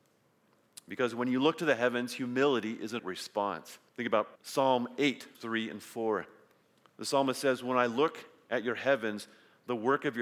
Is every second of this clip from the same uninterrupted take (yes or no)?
no